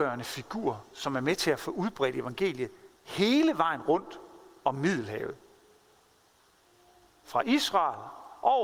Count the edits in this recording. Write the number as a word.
zero